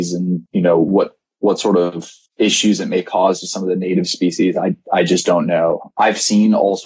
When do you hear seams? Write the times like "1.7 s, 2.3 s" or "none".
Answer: none